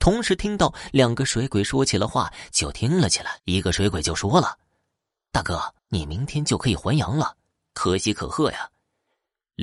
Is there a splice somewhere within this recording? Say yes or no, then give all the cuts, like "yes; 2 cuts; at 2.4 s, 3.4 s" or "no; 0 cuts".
yes; 2 cuts; at 3.4 s, 5.8 s